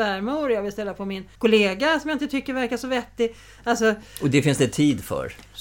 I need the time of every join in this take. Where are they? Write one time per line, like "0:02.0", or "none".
0:01.4

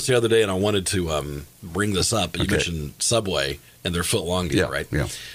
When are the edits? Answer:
0:03.7

